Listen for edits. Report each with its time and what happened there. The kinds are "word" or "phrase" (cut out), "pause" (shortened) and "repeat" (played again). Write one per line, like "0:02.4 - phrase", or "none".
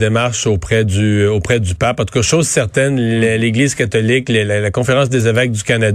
none